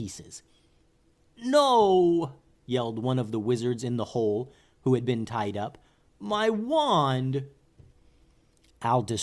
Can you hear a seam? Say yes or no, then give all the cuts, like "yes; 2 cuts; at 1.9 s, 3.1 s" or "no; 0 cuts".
no; 0 cuts